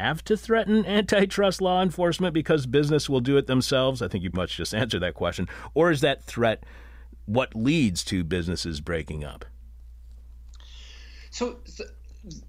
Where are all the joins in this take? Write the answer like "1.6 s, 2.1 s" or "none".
4.3 s